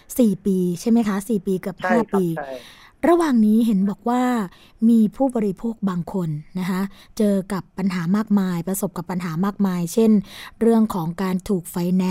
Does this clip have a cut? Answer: no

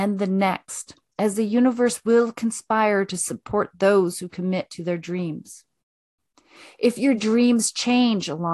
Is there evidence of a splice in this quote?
no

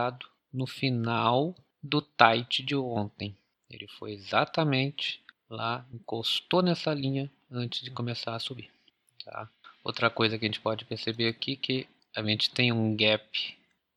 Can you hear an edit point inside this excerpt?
no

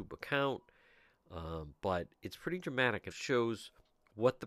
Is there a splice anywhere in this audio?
yes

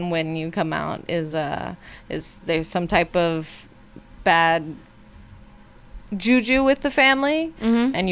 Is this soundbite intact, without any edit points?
yes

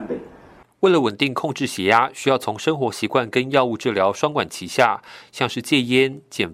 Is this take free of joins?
yes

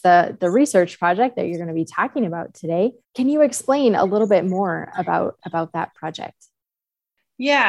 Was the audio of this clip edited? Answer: yes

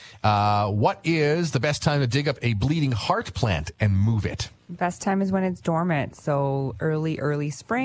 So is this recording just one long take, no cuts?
yes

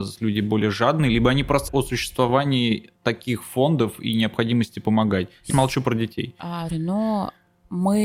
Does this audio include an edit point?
yes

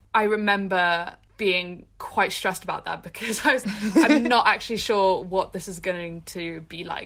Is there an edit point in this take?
yes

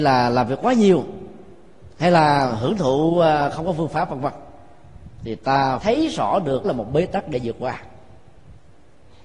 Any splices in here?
yes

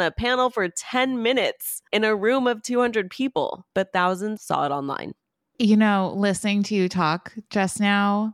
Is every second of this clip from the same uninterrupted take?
no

